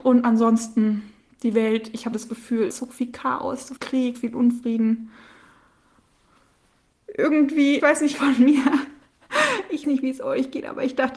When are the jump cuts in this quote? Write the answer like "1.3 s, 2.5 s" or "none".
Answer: 2.1 s, 2.7 s, 3.8 s, 4.1 s, 7.8 s, 8.1 s, 9.8 s